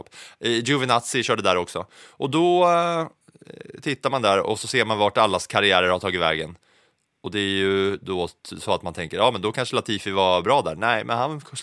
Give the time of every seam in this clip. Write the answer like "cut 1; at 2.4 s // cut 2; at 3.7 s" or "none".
none